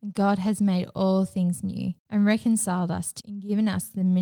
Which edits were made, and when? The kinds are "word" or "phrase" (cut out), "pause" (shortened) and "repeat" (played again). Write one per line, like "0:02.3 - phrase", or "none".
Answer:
0:02.0 - pause
0:03.2 - word